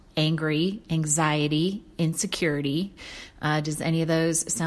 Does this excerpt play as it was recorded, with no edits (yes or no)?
yes